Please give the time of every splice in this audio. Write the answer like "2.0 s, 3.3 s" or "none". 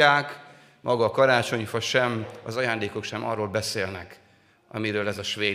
none